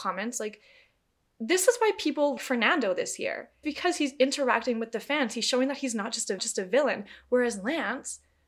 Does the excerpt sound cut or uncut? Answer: cut